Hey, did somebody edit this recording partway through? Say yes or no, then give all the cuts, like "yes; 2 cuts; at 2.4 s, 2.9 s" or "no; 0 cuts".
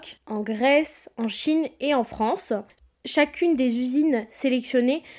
no; 0 cuts